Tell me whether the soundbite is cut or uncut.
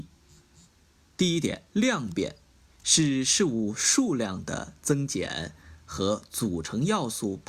cut